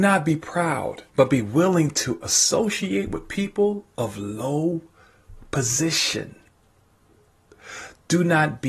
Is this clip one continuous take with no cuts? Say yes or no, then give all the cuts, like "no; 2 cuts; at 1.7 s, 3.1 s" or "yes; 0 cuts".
no; 1 cut; at 1.1 s